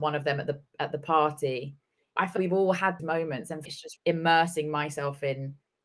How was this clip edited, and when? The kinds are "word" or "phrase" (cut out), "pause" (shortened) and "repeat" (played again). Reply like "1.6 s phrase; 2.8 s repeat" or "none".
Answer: 2.4 s word; 3.0 s word; 3.7 s word; 4.0 s word